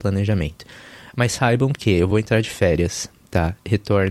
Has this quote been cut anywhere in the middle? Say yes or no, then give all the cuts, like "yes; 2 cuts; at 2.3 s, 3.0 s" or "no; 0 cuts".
no; 0 cuts